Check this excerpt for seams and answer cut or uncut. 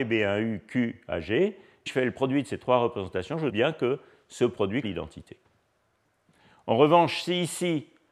cut